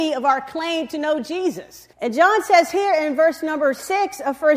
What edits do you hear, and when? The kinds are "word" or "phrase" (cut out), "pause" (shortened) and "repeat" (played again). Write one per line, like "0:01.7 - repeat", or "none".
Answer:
0:01.9 - pause